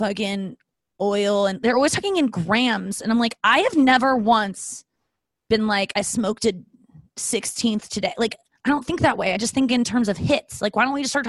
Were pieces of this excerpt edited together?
no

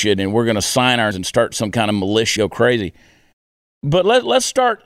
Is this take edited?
yes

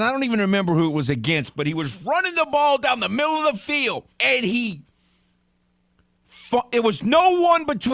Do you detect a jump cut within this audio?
yes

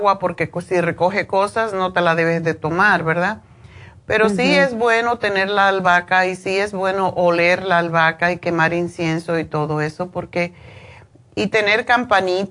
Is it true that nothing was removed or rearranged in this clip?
yes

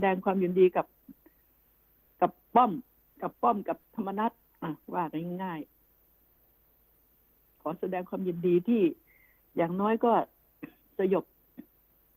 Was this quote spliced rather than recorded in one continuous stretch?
yes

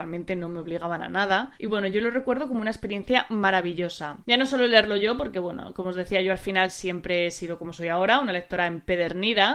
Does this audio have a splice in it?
yes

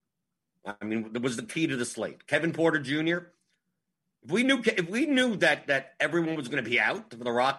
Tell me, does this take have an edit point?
no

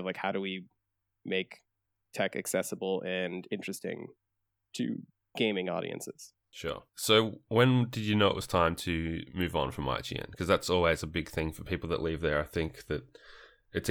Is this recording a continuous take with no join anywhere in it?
yes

